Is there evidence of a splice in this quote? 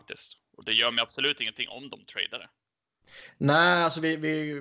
no; 0 cuts

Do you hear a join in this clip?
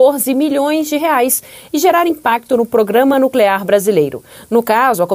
no; 0 cuts

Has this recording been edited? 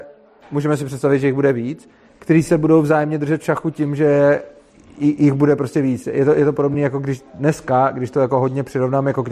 no; 0 cuts

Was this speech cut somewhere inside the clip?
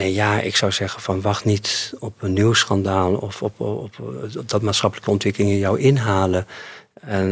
no; 0 cuts

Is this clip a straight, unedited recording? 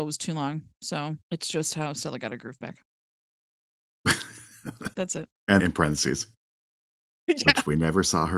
no; 3 cuts; at 1.2 s, 4.9 s, 5.6 s

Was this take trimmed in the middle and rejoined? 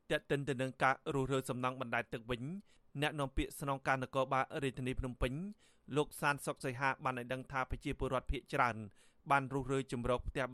no; 0 cuts

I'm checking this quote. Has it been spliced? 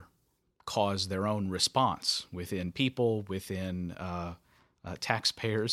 no; 0 cuts

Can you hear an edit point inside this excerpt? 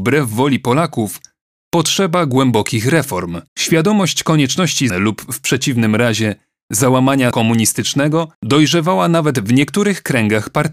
yes; 4 cuts; at 3.5 s, 4.9 s, 7.3 s, 8.3 s

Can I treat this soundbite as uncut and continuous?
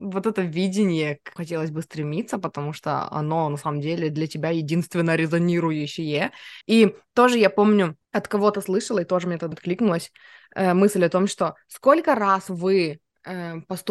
no; 4 cuts; at 1.4 s, 6.6 s, 8.0 s, 9.5 s

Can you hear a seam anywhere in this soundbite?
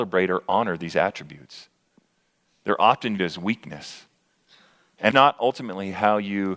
yes; 2 cuts; at 3.2 s, 5.1 s

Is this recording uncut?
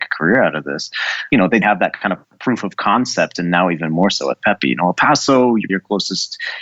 no; 2 cuts; at 1.6 s, 5.7 s

